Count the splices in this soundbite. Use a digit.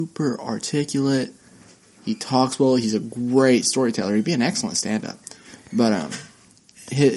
0